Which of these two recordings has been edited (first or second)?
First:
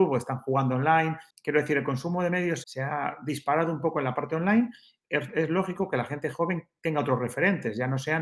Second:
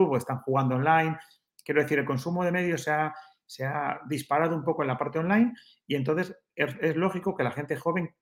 first